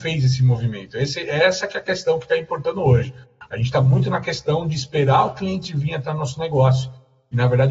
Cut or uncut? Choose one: uncut